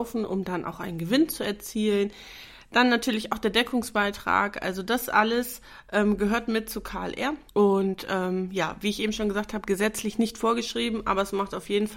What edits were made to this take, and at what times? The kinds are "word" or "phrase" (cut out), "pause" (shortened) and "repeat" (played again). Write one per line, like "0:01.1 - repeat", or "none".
0:07.5 - pause